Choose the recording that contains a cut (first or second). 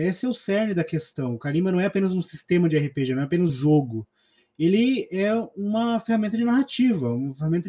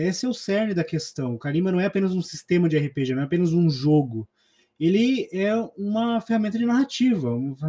first